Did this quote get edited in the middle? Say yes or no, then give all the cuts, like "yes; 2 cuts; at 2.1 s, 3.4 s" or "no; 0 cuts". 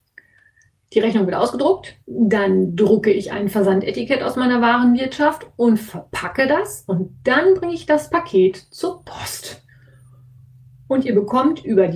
yes; 1 cut; at 2.0 s